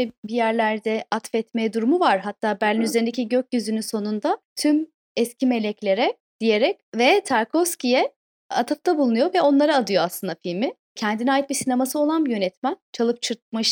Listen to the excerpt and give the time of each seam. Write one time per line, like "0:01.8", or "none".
0:06.9